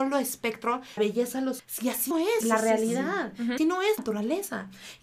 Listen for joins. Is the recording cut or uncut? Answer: cut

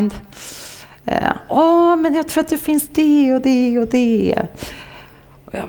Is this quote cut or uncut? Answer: uncut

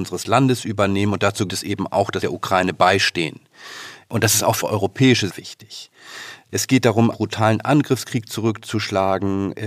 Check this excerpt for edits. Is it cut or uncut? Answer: cut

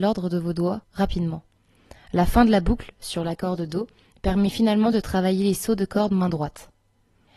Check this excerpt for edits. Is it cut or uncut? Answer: uncut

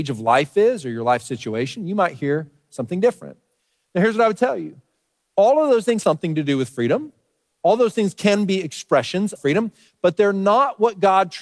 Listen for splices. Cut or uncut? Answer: cut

